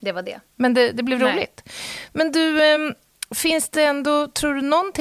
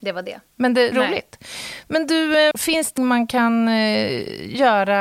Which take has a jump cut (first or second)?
second